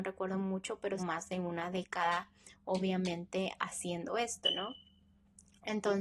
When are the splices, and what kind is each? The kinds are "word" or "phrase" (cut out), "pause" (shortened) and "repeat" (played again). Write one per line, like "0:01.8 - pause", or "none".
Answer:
0:01.0 - phrase